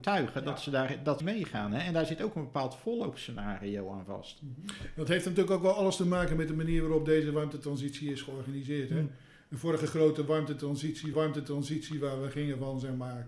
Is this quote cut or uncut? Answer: cut